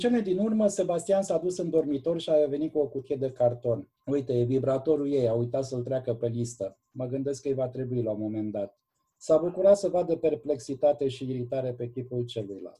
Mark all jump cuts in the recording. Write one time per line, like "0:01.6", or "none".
0:04.0
0:08.9